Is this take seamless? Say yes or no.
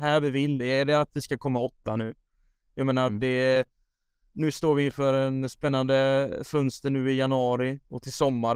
yes